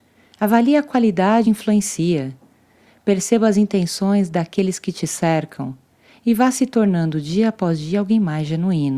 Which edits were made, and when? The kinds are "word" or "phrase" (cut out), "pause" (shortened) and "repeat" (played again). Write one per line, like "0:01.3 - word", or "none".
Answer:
0:01.4 - phrase